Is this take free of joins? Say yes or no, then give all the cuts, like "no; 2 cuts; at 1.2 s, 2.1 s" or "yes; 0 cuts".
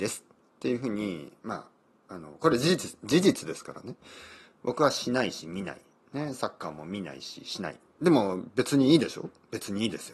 yes; 0 cuts